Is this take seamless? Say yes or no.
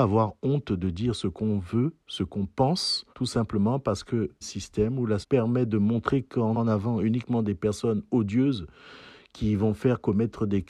no